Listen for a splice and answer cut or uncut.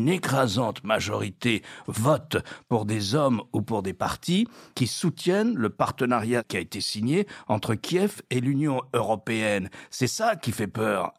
uncut